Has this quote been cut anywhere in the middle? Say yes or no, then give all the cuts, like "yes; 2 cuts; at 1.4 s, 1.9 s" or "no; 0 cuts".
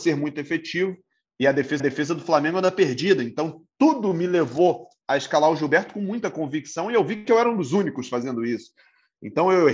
yes; 1 cut; at 1.8 s